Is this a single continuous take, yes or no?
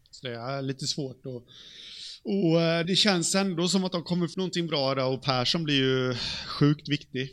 no